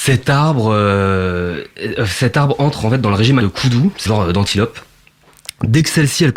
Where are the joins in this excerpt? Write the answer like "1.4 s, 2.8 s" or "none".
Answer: 3.4 s, 4.1 s